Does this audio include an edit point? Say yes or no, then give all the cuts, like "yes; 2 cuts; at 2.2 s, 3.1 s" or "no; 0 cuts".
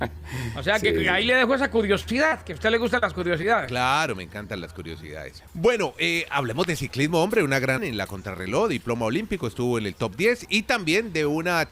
yes; 2 cuts; at 5.5 s, 7.8 s